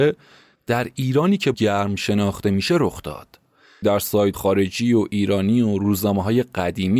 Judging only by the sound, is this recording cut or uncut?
cut